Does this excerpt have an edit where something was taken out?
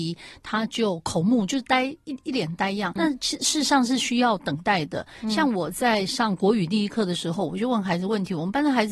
yes; 1 cut; at 3.0 s

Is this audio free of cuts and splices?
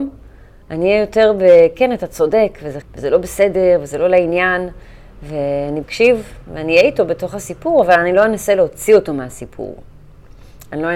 no; 2 cuts; at 2.8 s, 5.8 s

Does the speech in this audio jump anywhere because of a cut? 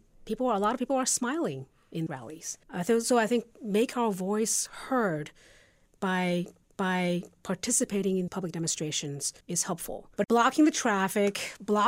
yes; 5 cuts; at 2.1 s, 2.6 s, 6.6 s, 8.3 s, 9.4 s

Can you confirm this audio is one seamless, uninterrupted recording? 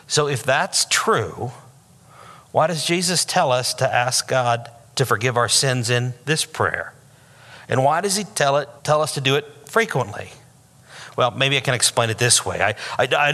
no; 1 cut; at 8.8 s

